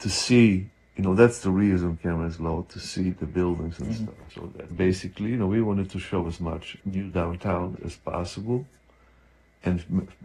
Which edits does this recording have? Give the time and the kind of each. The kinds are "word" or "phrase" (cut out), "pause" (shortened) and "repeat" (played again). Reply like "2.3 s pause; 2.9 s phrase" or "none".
4.7 s word; 6.8 s word; 7.8 s word